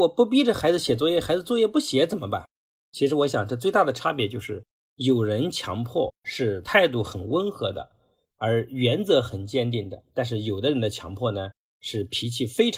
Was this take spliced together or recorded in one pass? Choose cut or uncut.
uncut